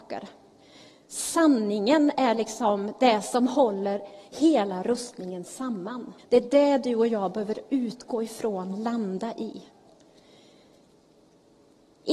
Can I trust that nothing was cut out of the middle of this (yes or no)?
no